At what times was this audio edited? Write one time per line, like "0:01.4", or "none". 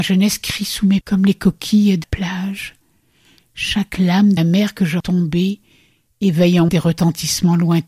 0:01.0
0:02.0
0:04.4
0:05.0
0:06.7